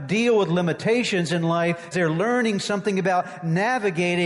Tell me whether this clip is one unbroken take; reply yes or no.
no